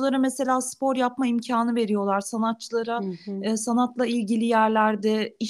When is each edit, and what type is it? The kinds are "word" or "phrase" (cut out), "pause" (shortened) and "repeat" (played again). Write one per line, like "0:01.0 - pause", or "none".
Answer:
none